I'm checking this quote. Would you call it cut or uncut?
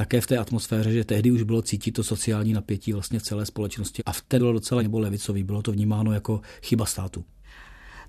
cut